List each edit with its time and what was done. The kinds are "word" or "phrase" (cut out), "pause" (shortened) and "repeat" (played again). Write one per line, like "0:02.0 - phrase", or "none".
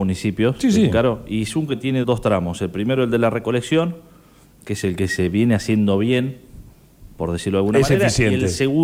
0:01.7 - word
0:02.0 - word